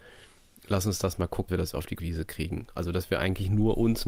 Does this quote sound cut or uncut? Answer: cut